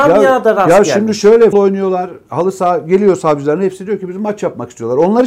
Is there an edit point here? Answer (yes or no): yes